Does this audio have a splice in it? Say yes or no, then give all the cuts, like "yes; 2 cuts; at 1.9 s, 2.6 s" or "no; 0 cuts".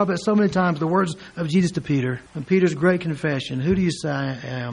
yes; 1 cut; at 2.3 s